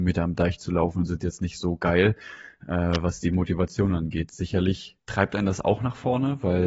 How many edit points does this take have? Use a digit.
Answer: 1